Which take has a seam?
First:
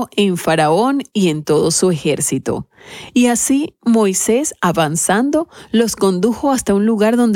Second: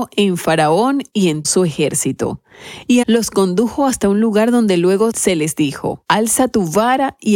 second; 2 cuts; at 1.4 s, 3.0 s

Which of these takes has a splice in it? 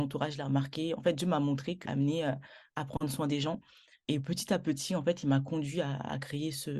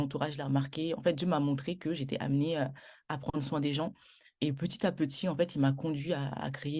first; 1 cut; at 1.9 s

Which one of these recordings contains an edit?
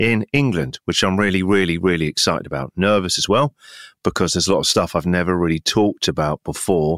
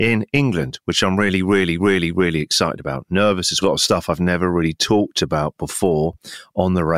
second; 2 cuts; at 1.8 s, 3.6 s

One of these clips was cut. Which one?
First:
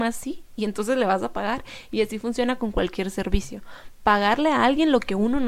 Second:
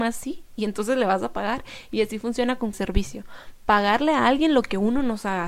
second; 1 cut; at 2.7 s

